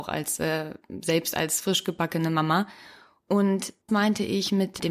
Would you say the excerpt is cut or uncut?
cut